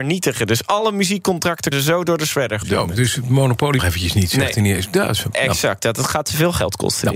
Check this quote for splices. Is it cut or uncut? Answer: cut